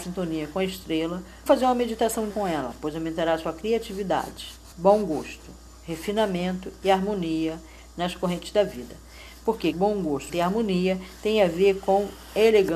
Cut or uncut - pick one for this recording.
cut